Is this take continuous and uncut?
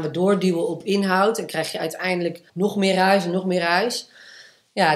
no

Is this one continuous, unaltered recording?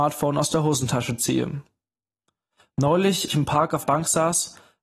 no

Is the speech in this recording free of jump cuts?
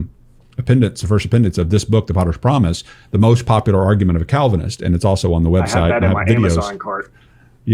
yes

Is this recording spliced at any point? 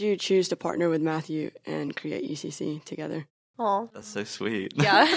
no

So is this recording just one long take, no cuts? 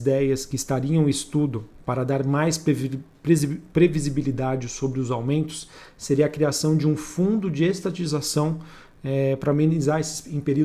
yes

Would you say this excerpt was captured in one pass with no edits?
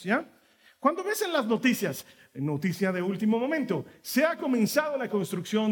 yes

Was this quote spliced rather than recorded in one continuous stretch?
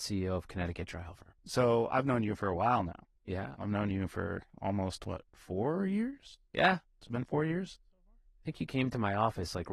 yes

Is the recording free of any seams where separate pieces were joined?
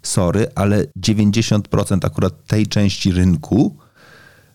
no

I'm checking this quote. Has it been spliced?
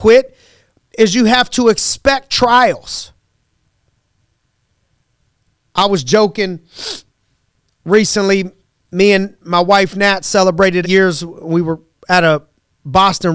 yes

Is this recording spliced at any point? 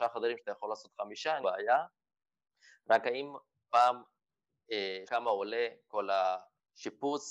yes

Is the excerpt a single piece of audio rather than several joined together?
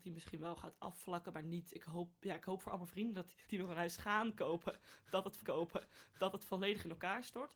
no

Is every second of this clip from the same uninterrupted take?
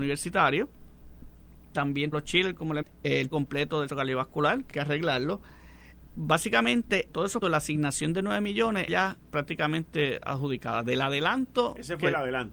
no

